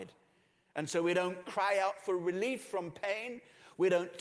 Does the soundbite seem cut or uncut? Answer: uncut